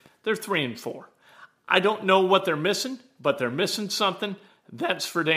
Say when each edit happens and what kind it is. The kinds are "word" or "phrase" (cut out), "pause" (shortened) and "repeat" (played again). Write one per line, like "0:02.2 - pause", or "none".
none